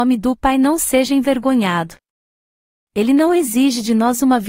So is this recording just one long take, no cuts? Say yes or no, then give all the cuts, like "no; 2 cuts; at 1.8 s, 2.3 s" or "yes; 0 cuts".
yes; 0 cuts